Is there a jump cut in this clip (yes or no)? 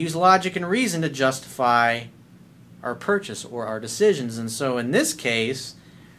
no